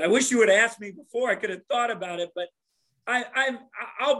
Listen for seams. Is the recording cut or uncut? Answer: uncut